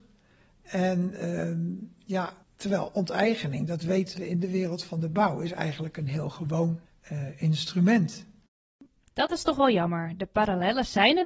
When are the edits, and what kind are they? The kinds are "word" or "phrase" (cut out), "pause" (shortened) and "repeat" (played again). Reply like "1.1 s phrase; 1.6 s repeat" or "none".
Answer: 2.4 s pause; 6.9 s pause; 9.1 s pause